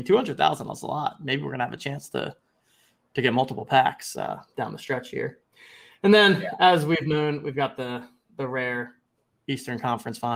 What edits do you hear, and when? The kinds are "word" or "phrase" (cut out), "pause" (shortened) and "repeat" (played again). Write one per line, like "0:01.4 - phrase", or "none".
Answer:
none